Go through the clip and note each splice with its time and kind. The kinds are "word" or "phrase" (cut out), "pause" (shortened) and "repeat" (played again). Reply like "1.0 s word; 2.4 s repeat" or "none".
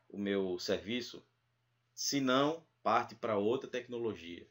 none